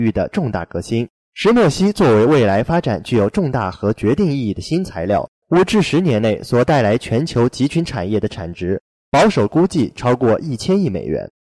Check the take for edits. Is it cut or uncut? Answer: cut